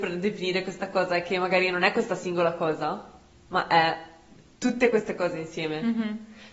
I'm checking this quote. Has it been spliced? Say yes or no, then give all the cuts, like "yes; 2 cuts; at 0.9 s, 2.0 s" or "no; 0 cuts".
no; 0 cuts